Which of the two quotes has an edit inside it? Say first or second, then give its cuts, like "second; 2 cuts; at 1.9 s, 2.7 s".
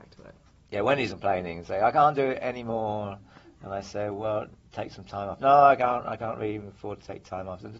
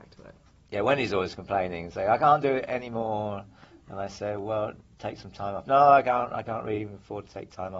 first; 1 cut; at 1.1 s